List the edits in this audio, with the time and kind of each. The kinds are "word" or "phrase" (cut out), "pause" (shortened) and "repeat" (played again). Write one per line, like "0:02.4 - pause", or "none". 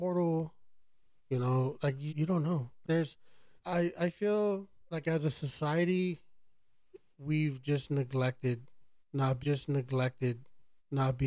0:02.1 - word
0:02.8 - word
0:03.6 - pause
0:04.9 - pause
0:09.4 - repeat

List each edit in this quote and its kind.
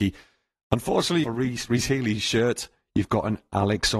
0:01.2 - phrase

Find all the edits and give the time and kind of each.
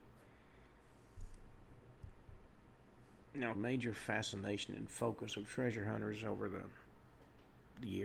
0:03.5 - phrase

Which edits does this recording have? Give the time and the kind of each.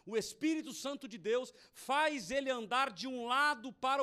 none

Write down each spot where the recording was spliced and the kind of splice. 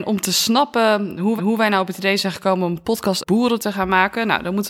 0:01.4 - repeat
0:03.2 - word

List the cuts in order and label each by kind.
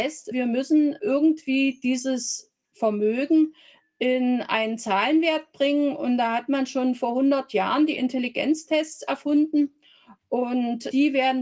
none

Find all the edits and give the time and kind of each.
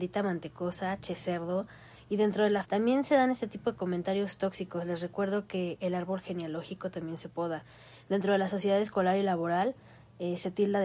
0:02.6 - word

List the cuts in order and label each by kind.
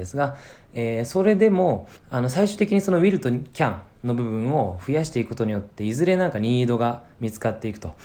0:02.0 - pause

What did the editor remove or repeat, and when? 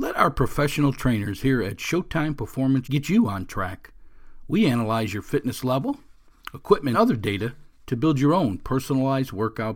0:02.8 - word
0:06.9 - phrase

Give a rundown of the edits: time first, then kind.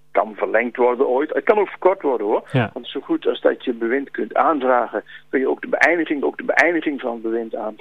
0:02.8 - word
0:06.2 - repeat

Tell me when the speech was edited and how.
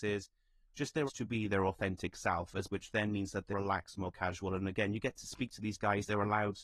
0:01.1 - word
0:02.7 - word
0:03.5 - word

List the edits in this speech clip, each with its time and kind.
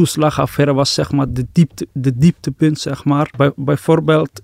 none

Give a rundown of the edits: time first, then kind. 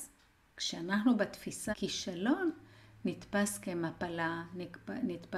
0:01.7 - word

